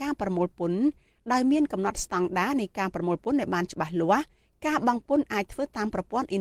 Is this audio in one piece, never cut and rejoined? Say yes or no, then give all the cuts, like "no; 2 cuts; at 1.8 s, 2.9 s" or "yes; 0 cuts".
yes; 0 cuts